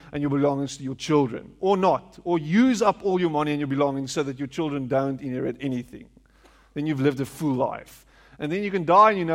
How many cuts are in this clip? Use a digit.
0